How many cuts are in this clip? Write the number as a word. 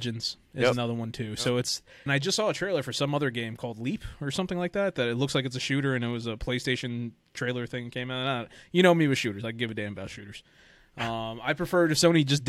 one